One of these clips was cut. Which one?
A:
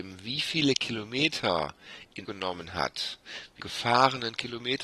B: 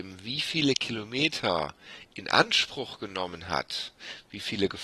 A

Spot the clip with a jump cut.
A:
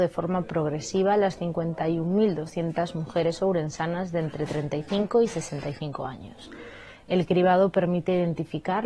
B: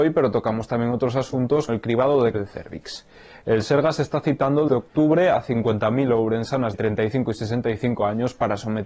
B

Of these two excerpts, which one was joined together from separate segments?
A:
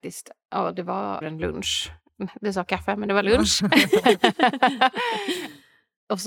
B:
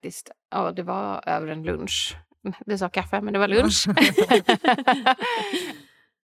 A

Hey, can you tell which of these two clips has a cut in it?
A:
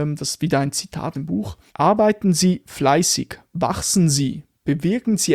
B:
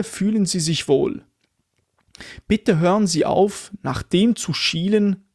A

